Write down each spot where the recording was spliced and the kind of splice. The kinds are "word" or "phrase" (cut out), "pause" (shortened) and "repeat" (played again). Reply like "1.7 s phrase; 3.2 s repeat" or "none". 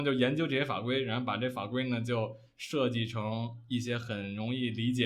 none

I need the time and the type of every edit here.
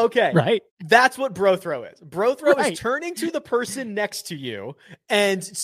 none

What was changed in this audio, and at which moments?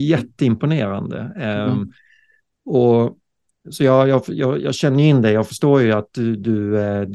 none

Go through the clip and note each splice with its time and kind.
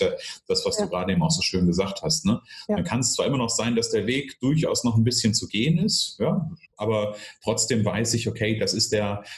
6.6 s pause

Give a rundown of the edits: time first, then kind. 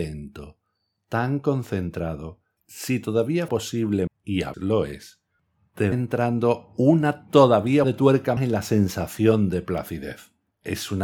2.6 s word; 3.5 s word; 4.1 s word; 4.5 s word; 5.9 s word; 7.8 s word; 8.4 s word

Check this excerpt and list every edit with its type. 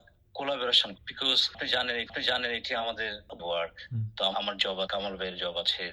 1.0 s word; 2.1 s repeat; 3.4 s word; 4.3 s phrase; 4.9 s word

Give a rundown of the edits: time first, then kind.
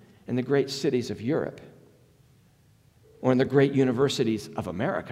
none

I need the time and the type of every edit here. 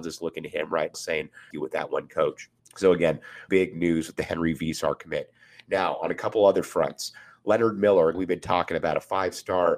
0.9 s word; 1.5 s phrase; 2.6 s pause; 3.5 s word; 8.1 s word

